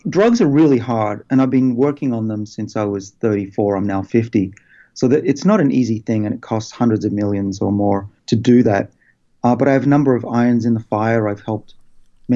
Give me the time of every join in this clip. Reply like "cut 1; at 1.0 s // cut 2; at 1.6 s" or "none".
cut 1; at 8.2 s